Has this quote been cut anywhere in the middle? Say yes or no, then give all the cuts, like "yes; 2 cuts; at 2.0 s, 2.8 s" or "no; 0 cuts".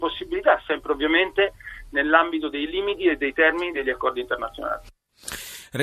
no; 0 cuts